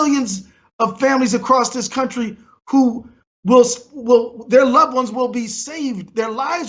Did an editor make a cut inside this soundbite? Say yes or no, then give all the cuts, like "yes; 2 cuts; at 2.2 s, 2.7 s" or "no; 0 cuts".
no; 0 cuts